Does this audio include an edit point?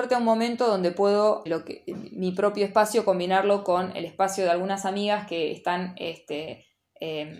yes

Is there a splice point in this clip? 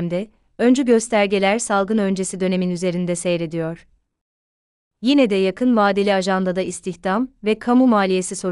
no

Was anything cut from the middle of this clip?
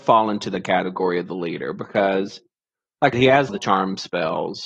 yes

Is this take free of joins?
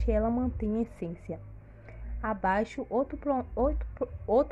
yes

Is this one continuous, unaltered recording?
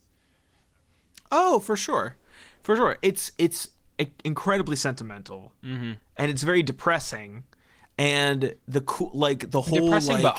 yes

